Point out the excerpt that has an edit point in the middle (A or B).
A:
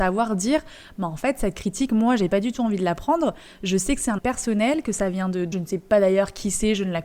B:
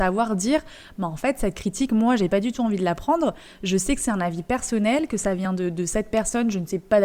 A